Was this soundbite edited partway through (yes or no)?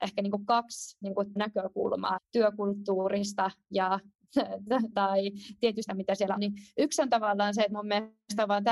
yes